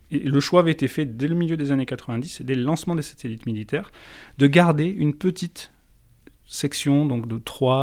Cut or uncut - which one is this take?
uncut